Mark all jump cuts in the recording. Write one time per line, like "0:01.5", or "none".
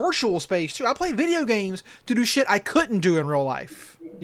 none